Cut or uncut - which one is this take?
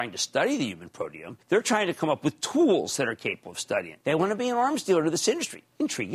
cut